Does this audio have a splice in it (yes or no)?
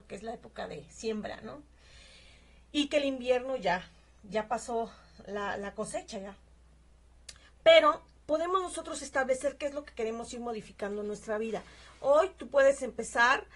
no